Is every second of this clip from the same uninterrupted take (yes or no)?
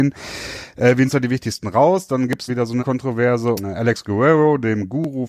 no